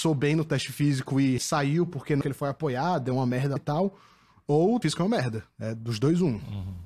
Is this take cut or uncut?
cut